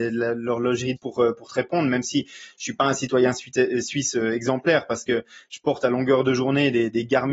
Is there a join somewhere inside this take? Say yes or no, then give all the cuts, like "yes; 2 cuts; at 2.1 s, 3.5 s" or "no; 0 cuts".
yes; 1 cut; at 1.0 s